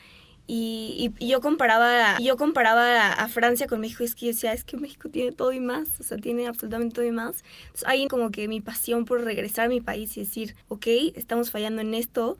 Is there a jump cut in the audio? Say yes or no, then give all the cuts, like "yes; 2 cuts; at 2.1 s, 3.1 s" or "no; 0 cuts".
yes; 3 cuts; at 2.2 s, 8.1 s, 10.6 s